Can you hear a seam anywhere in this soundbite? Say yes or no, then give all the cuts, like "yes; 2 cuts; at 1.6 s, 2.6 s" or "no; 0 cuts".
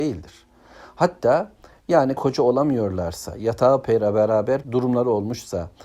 yes; 2 cuts; at 2.2 s, 4.6 s